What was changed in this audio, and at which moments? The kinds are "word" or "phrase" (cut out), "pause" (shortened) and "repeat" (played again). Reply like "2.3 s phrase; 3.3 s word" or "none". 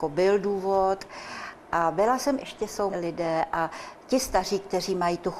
2.4 s phrase; 2.9 s word